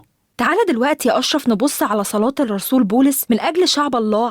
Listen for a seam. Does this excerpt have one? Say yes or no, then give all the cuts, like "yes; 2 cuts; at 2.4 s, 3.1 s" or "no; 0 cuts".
no; 0 cuts